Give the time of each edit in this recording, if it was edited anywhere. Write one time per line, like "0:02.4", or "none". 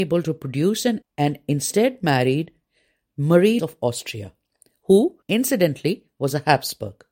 0:01.0
0:03.6
0:05.2